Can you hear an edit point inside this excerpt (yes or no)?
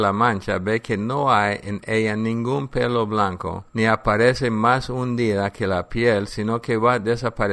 yes